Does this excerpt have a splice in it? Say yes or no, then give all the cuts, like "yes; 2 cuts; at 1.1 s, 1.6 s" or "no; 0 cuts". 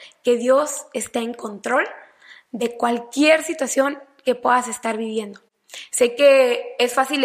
no; 0 cuts